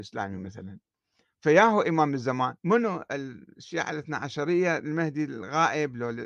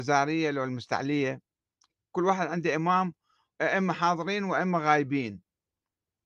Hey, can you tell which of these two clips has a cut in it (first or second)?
first